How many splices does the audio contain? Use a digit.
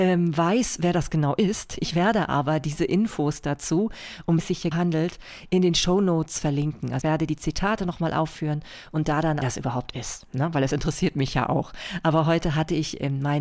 4